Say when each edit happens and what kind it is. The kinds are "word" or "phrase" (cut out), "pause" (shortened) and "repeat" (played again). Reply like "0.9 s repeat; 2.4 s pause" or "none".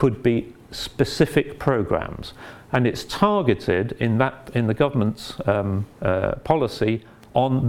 5.9 s pause

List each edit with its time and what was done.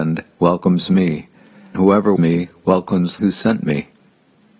1.7 s word; 2.2 s word; 3.2 s phrase

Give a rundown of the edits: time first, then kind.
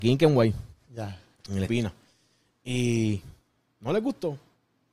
1.7 s word

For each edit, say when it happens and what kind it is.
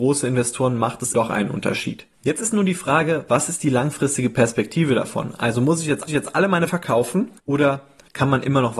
1.1 s word; 2.1 s pause; 6.1 s repeat; 6.7 s word; 7.4 s pause

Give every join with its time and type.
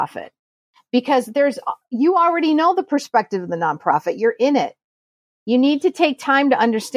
none

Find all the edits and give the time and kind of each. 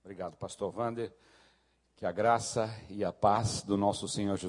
none

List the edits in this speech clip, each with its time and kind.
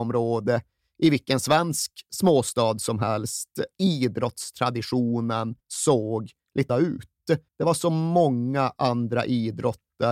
3.7 s phrase; 5.6 s pause; 6.7 s word; 7.5 s pause

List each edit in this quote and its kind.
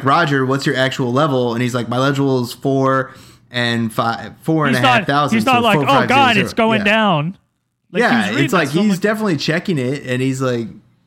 none

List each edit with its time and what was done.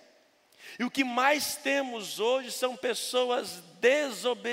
none

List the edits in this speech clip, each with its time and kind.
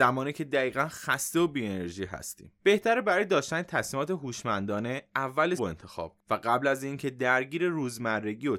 2.6 s pause; 5.6 s word; 6.2 s word

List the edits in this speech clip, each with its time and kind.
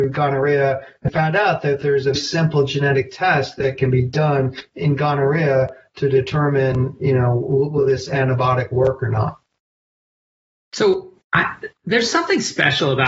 1.1 s word; 2.2 s word; 11.2 s pause

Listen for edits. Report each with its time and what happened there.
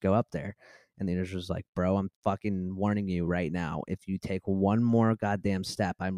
none

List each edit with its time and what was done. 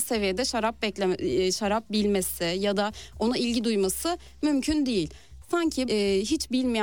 5.9 s word

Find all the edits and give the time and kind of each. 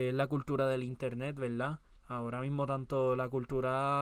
2.0 s pause

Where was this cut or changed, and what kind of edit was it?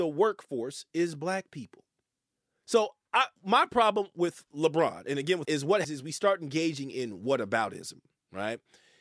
2.0 s pause; 3.4 s pause; 5.4 s word; 5.8 s word

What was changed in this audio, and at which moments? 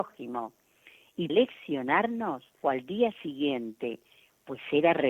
1.3 s word; 2.6 s word

